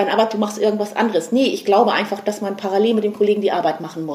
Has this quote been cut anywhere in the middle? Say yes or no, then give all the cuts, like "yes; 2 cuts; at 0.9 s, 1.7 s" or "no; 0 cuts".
no; 0 cuts